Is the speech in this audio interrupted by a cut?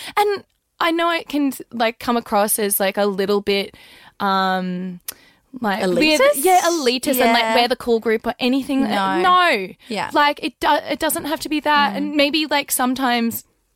no; 0 cuts

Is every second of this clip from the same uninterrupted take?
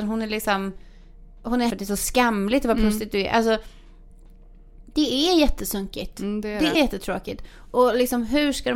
no; 2 cuts; at 1.7 s, 6.7 s

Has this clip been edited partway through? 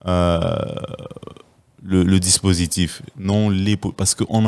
no; 0 cuts

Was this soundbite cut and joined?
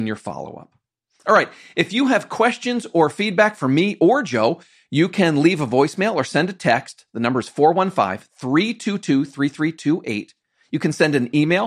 no; 0 cuts

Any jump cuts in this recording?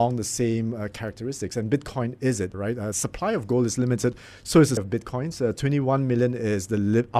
yes; 3 cuts; at 2.5 s, 2.9 s, 4.8 s

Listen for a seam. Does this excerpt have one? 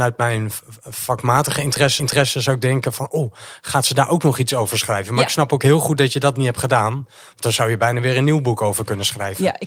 yes; 1 cut; at 2.0 s

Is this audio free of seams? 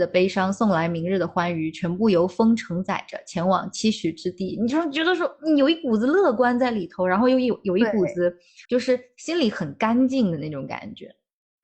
no; 1 cut; at 8.6 s

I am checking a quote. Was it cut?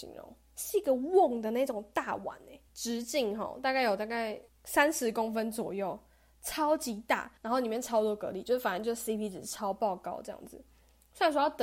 yes; 3 cuts; at 2.7 s, 4.5 s, 7.4 s

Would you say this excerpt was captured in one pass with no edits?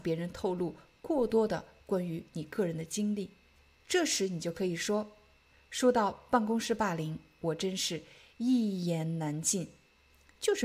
yes; 0 cuts

